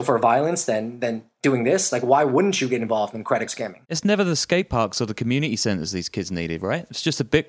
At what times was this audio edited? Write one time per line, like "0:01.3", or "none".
0:03.5
0:03.8